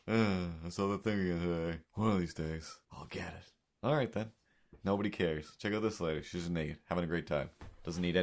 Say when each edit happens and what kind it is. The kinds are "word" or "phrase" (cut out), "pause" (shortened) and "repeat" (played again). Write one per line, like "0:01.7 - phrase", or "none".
0:01.8 - pause
0:02.8 - pause